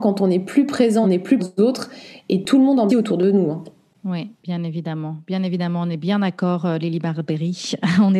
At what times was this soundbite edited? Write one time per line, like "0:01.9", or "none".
0:01.0
0:01.4
0:02.9
0:04.4